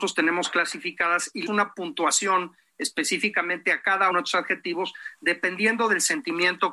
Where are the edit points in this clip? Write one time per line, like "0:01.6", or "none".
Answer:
0:01.5
0:04.1